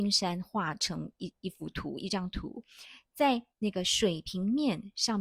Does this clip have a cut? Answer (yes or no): yes